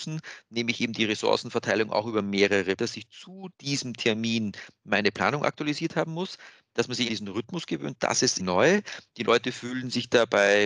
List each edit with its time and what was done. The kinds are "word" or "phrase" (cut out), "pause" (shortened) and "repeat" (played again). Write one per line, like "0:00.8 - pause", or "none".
0:02.8 - word
0:03.5 - pause
0:07.1 - word
0:08.4 - word